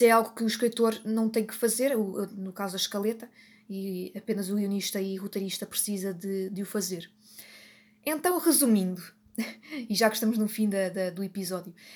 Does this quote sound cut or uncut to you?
uncut